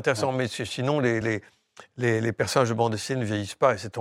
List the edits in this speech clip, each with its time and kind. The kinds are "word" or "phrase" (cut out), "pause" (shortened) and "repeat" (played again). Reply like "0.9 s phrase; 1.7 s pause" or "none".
none